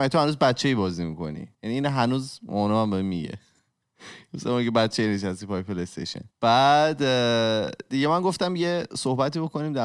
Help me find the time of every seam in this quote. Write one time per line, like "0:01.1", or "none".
0:01.5
0:06.3